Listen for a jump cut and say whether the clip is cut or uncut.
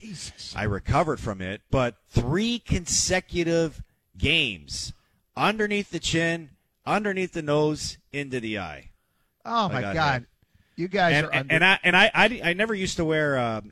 uncut